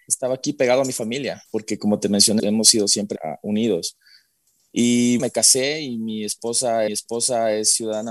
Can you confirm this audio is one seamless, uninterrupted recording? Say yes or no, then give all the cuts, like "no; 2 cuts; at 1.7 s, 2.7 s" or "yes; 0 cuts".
no; 5 cuts; at 1.5 s, 2.4 s, 3.2 s, 5.2 s, 6.9 s